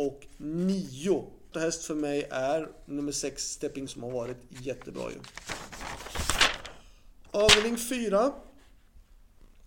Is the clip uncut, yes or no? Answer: no